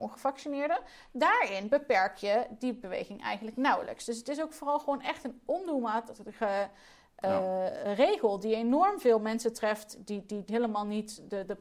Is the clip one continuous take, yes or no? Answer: yes